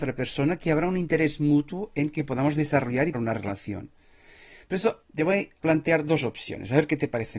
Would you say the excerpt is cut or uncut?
cut